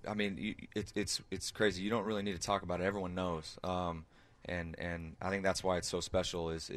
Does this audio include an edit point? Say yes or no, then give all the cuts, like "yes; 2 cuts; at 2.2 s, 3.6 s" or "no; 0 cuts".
no; 0 cuts